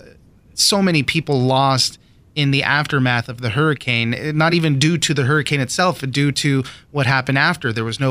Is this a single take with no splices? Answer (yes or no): yes